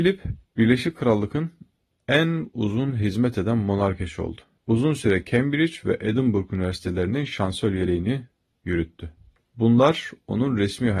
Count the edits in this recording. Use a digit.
0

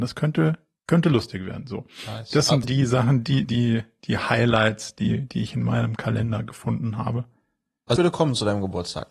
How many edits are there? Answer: 3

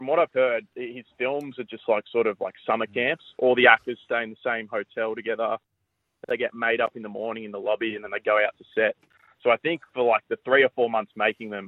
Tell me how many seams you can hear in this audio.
0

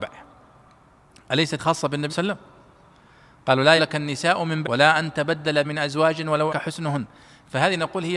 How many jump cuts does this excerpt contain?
6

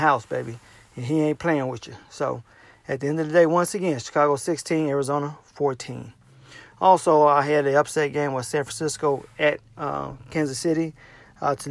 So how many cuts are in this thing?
0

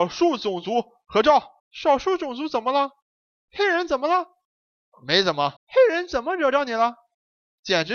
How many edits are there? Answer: 2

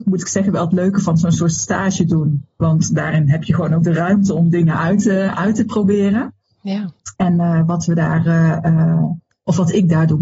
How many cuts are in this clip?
1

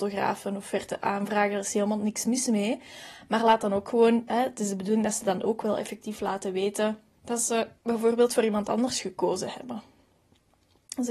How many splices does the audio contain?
1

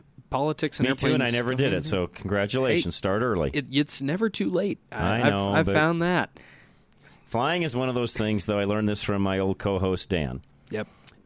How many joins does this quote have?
0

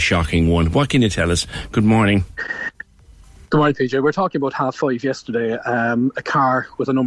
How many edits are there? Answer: 0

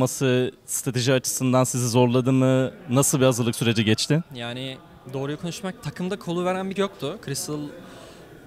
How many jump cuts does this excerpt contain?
3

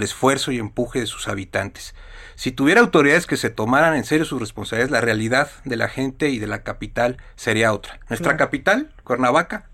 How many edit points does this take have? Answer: 0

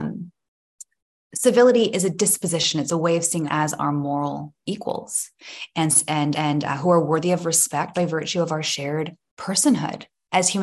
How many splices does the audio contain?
3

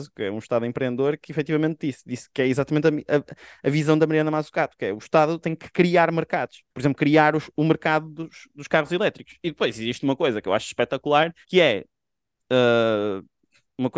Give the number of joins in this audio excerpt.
2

